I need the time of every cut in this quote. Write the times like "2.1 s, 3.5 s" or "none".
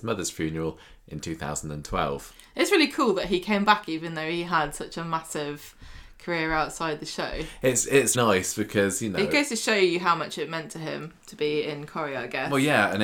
8.1 s

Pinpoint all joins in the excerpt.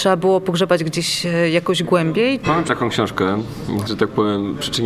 2.7 s, 3.9 s

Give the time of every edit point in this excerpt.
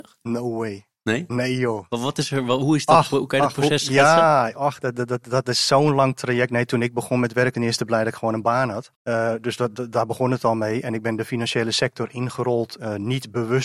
7.5 s, 8.9 s

